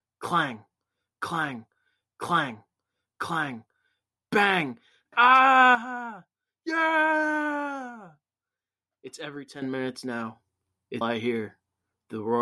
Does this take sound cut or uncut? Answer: cut